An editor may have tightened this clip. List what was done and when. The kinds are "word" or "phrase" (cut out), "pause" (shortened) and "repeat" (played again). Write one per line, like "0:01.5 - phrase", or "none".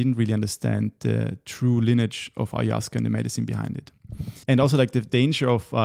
0:04.4 - pause

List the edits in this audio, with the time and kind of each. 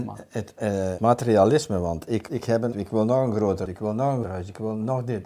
0:01.0 - word
0:02.3 - word
0:02.7 - word
0:03.7 - word
0:04.2 - word

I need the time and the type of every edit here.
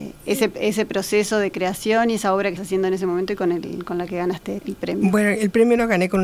0:02.6 - word
0:04.6 - word

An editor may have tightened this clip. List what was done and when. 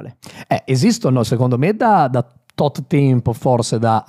none

